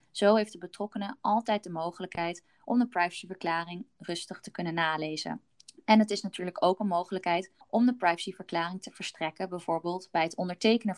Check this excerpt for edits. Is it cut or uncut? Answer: cut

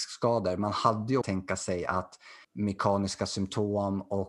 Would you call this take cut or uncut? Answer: cut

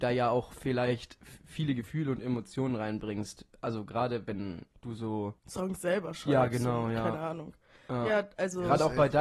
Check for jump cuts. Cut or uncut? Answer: cut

